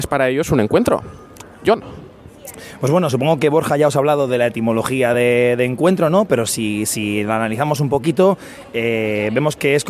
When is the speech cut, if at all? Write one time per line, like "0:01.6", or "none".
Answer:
none